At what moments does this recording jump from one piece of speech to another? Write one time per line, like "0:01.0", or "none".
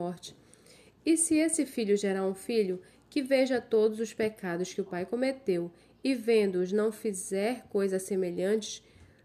none